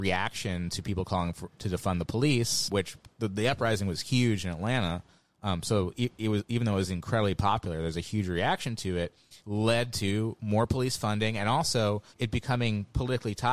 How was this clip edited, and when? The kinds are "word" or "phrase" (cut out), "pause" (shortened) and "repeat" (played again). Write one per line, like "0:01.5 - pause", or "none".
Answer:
0:09.4 - pause
0:12.1 - pause